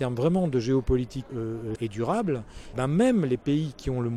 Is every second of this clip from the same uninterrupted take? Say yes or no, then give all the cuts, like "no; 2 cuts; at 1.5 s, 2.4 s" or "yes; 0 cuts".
no; 3 cuts; at 1.3 s, 1.8 s, 2.7 s